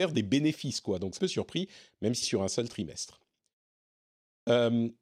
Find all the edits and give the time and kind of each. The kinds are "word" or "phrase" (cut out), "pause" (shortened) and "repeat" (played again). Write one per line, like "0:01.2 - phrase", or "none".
0:01.2 - phrase
0:02.2 - word